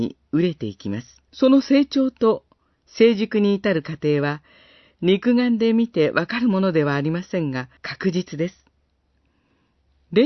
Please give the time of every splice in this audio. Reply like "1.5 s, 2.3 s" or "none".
1.3 s, 7.8 s